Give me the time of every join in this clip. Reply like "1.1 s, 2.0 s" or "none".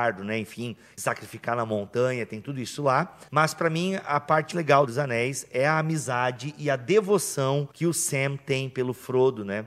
1.0 s, 3.3 s, 4.5 s, 4.9 s, 7.7 s